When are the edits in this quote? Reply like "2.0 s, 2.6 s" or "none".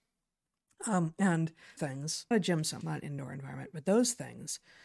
1.8 s, 2.3 s, 2.8 s